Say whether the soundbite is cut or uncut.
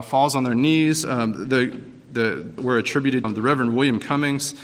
cut